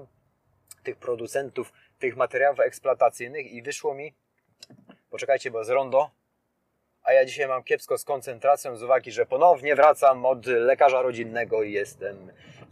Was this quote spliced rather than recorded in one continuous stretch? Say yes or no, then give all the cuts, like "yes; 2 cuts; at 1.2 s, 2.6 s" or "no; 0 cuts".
no; 0 cuts